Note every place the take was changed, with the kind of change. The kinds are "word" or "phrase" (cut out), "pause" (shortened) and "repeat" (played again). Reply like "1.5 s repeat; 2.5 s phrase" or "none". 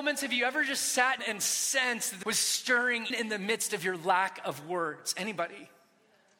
1.2 s word; 2.2 s word; 3.1 s word